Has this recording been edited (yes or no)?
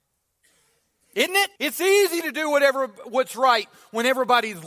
yes